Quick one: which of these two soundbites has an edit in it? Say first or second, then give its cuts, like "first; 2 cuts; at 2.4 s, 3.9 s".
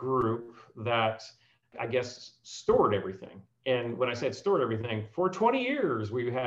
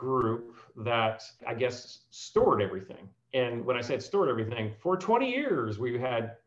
second; 1 cut; at 1.4 s